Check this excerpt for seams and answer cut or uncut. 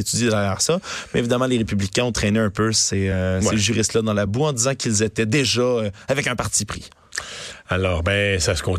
uncut